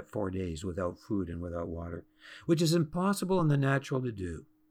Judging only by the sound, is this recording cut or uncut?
uncut